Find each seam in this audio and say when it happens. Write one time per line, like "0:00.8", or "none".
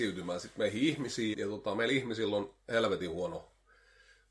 0:01.3